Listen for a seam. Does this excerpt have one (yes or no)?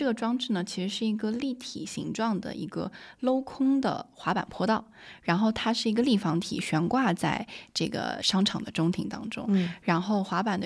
no